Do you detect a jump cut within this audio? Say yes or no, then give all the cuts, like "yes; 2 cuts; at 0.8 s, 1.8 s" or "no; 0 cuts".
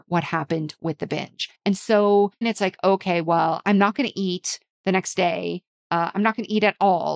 yes; 2 cuts; at 1.5 s, 2.4 s